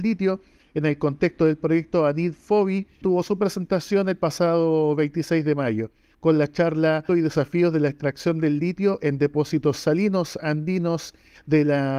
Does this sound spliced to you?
yes; 2 cuts; at 3.0 s, 7.1 s

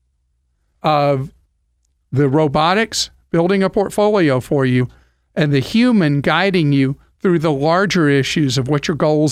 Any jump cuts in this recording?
no; 0 cuts

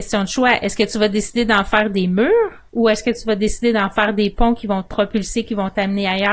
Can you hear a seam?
yes; 1 cut; at 2.7 s

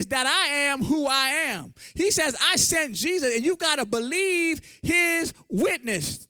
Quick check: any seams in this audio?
no; 0 cuts

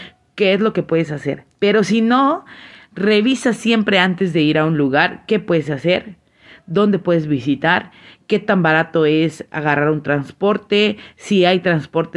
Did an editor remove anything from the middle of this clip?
no; 0 cuts

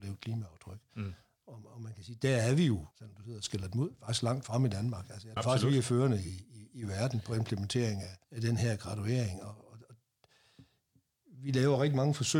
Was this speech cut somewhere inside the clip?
yes; 3 cuts; at 2.9 s, 5.4 s, 8.2 s

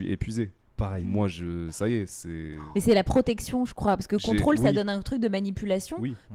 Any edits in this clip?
no; 0 cuts

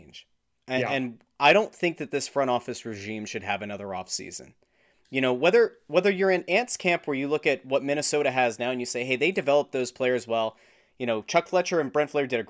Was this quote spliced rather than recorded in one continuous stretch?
no; 0 cuts

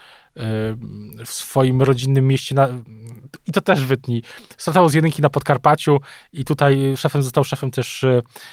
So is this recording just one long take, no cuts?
yes; 0 cuts

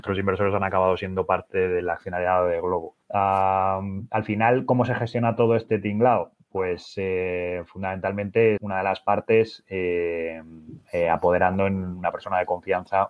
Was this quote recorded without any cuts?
no; 2 cuts; at 3.0 s, 8.6 s

